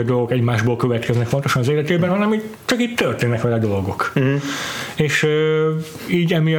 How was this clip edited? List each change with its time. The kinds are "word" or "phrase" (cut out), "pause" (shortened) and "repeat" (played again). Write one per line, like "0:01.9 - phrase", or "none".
none